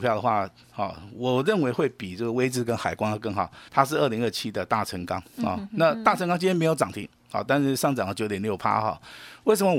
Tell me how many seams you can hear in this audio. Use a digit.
1